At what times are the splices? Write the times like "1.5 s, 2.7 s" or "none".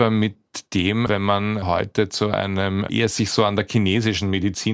1.1 s, 2.9 s